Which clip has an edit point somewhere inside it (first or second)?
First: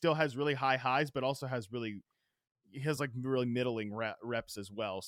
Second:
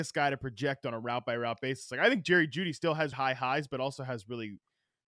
second